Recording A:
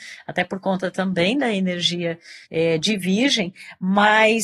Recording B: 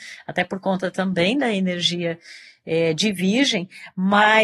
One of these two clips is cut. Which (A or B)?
A